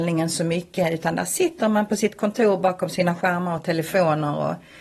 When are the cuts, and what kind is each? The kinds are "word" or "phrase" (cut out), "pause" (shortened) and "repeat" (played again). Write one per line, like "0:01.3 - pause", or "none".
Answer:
none